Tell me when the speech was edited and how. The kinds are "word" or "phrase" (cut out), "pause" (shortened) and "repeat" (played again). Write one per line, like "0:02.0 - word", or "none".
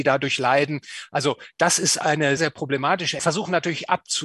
0:02.4 - word
0:03.2 - phrase

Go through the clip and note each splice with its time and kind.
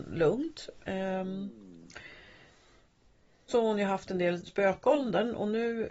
0:03.5 - word
0:04.4 - word

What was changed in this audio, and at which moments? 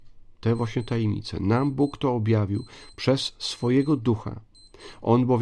none

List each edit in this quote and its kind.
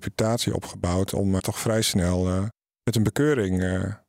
0:01.4 - word
0:02.7 - pause

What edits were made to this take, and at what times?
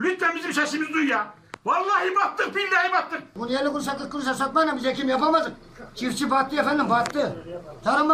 none

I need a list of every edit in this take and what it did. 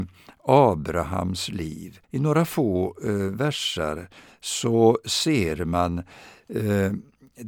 0:02.0 - pause

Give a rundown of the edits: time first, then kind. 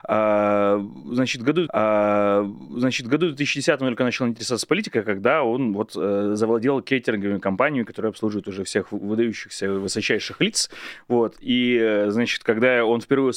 0:01.7 - repeat

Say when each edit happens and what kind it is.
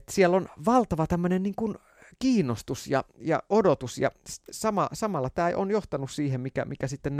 none

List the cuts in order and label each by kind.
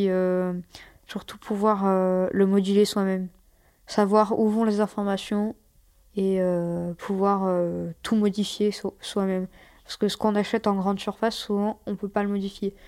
none

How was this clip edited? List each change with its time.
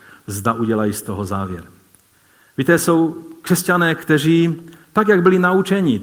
none

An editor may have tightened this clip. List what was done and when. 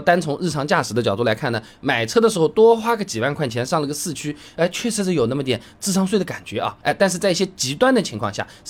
0:06.8 - pause

